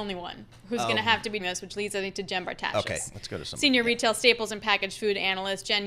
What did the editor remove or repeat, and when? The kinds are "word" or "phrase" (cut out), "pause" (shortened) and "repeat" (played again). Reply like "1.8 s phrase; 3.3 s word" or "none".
1.4 s word

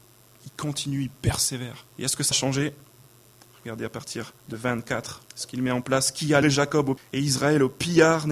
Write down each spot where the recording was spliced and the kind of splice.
1.9 s pause; 2.3 s word; 4.4 s pause; 5.3 s pause; 6.4 s word; 7.0 s word

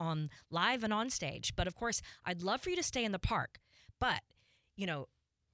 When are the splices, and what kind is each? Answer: none

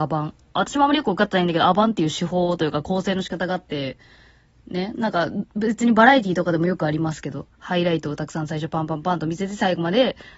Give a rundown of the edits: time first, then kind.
none

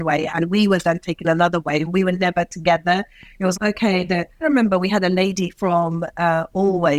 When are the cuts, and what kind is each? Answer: 3.5 s word; 4.4 s word

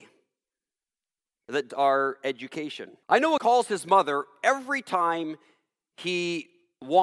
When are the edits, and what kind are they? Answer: 1.7 s word; 3.0 s pause; 3.4 s phrase

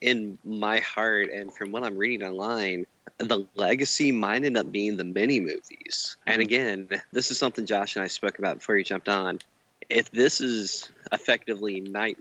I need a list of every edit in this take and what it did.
6.2 s pause; 7.1 s word

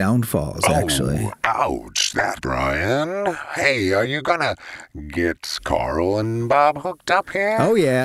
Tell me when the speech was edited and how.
2.4 s word

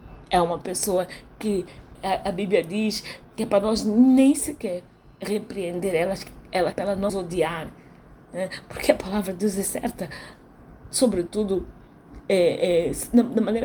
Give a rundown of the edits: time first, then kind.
2.0 s word; 3.2 s word; 6.7 s word; 7.1 s word

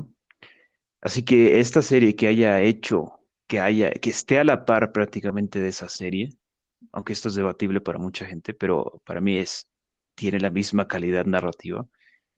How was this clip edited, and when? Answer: none

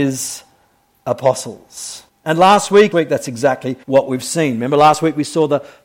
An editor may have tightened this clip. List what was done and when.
2.1 s pause; 2.9 s phrase; 3.8 s pause

